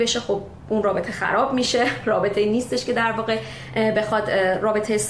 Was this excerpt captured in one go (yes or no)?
yes